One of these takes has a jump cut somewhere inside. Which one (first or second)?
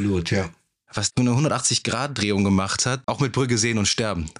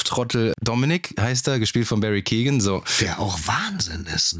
first